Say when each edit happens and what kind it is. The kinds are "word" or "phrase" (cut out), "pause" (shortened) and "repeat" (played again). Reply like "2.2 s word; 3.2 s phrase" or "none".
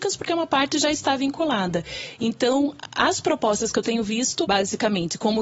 4.4 s word